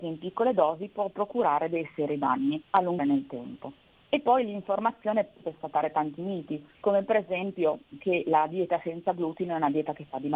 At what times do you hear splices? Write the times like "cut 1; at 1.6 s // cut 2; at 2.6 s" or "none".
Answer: cut 1; at 2.7 s // cut 2; at 3.0 s // cut 3; at 3.9 s // cut 4; at 5.4 s